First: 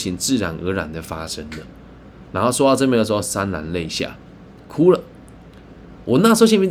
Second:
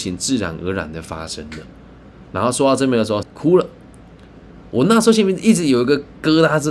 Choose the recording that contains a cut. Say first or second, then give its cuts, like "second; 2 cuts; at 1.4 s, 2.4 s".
second; 1 cut; at 3.2 s